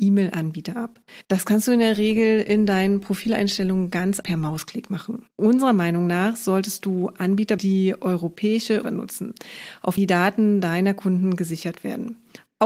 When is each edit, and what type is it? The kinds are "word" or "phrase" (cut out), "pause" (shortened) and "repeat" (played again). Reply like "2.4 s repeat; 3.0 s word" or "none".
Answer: 1.2 s pause; 4.2 s word; 5.3 s pause; 7.6 s word; 8.8 s phrase; 10.0 s word

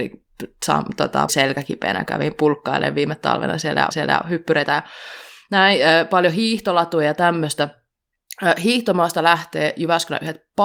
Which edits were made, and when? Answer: 1.3 s phrase; 2.1 s word; 3.9 s repeat

